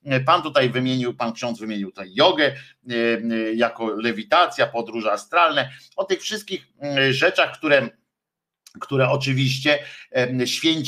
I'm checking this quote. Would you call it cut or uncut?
uncut